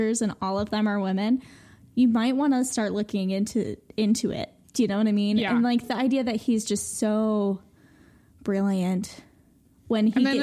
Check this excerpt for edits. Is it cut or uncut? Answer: cut